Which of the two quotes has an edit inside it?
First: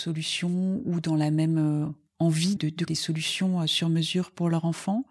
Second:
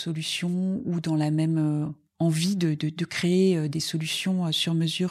first; 2 cuts; at 2.6 s, 2.9 s

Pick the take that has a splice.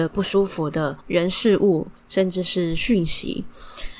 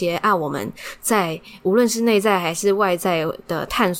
first; 1 cut; at 1.0 s

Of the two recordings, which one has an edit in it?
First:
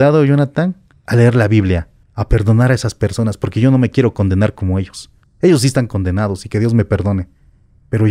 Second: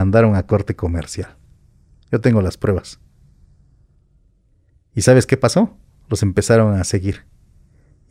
first; 3 cuts; at 0.9 s, 2.0 s, 5.2 s

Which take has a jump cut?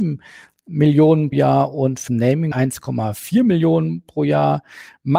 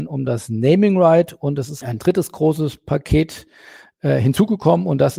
first; 3 cuts; at 1.3 s, 2.1 s, 2.5 s

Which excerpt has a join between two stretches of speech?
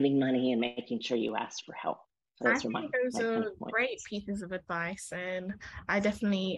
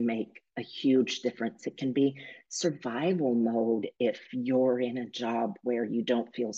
first; 1 cut; at 2.4 s

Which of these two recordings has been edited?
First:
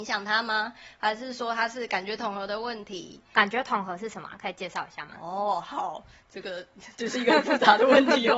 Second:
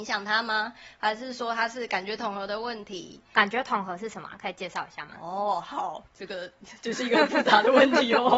second; 1 cut; at 6.1 s

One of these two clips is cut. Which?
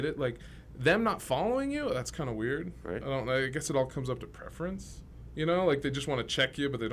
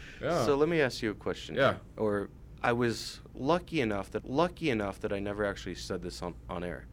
second; 1 cut; at 4.2 s

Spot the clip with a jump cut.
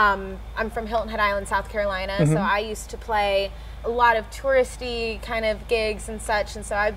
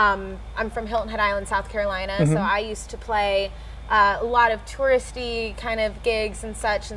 first; 1 cut; at 3.8 s

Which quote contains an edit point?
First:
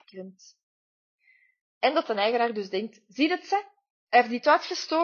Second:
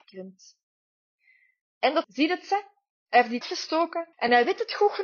second; 3 cuts; at 2.0 s, 3.4 s, 4.1 s

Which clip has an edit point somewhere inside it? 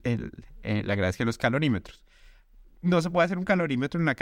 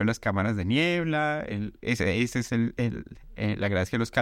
second; 1 cut; at 1.8 s

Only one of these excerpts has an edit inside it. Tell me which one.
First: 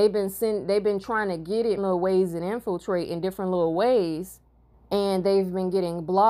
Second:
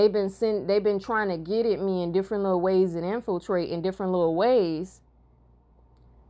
first; 2 cuts; at 1.8 s, 4.7 s

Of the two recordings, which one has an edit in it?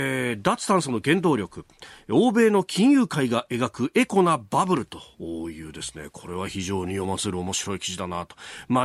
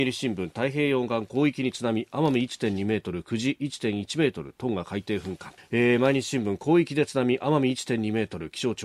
second; 1 cut; at 5.6 s

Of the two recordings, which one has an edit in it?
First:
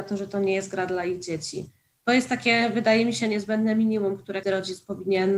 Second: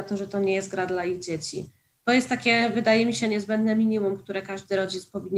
first; 1 cut; at 4.4 s

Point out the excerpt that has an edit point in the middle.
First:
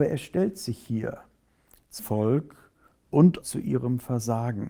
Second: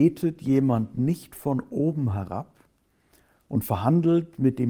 first; 2 cuts; at 2.0 s, 3.4 s

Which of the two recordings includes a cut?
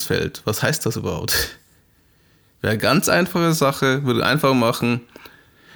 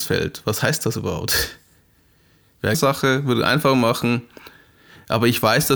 second; 1 cut; at 2.7 s

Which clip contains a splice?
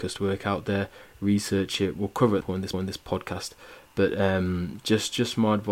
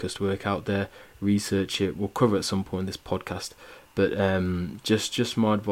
first; 2 cuts; at 2.4 s, 2.7 s

